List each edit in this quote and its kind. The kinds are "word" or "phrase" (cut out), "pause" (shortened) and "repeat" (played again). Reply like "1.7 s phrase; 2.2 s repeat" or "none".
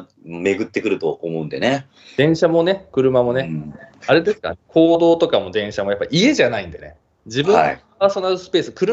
none